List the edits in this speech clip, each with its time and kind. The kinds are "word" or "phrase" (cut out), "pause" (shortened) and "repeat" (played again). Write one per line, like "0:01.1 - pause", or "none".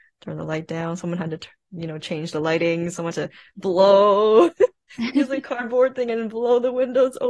0:03.1 - word